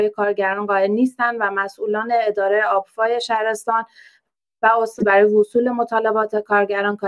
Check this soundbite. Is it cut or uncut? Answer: uncut